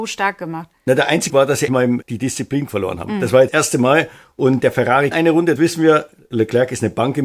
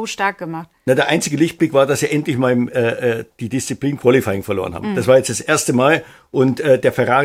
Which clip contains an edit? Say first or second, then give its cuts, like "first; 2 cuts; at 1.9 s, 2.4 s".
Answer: first; 8 cuts; at 1.3 s, 1.7 s, 2.0 s, 2.7 s, 3.5 s, 4.6 s, 5.1 s, 5.6 s